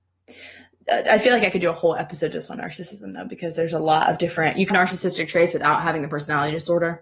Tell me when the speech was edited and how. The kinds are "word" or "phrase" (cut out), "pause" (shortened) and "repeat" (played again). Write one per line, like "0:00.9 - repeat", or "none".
0:04.7 - word